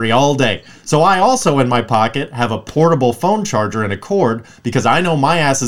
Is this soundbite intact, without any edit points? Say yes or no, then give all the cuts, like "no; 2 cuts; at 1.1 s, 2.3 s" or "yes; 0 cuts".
yes; 0 cuts